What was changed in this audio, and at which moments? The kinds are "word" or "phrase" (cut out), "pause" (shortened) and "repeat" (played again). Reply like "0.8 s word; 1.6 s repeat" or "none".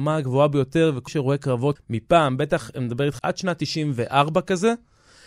1.1 s word; 1.8 s word; 3.2 s word

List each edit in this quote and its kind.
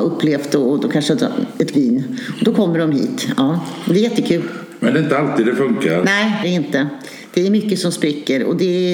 1.7 s word; 6.4 s phrase

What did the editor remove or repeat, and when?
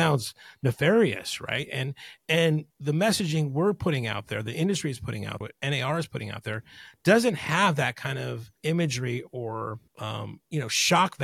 2.7 s pause; 5.4 s word; 8.6 s pause; 9.9 s pause

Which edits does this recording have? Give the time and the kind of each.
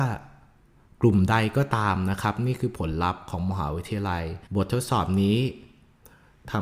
4.5 s pause

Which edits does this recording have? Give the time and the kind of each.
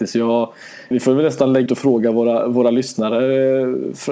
0.9 s word; 1.7 s word

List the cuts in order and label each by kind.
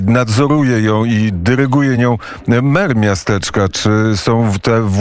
none

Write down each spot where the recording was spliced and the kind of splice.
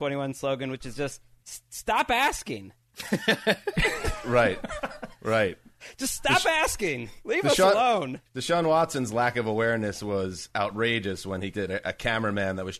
8.3 s pause; 11.5 s phrase

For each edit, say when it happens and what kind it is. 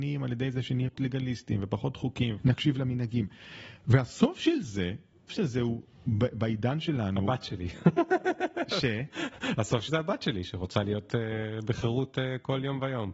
0.9 s word; 2.4 s word; 5.3 s word; 9.9 s word

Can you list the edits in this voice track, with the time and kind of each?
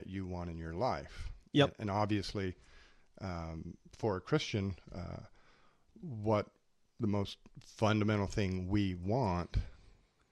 none

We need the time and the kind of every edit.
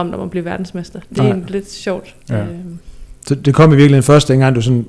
2.2 s pause

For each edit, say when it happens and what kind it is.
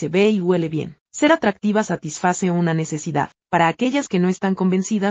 1.0 s pause

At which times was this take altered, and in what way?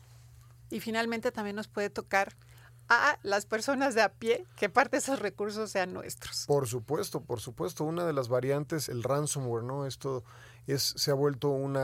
8.9 s word

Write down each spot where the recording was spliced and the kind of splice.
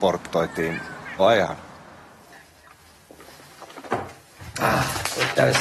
1.2 s word

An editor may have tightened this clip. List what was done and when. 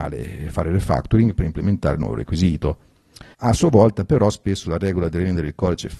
3.3 s pause

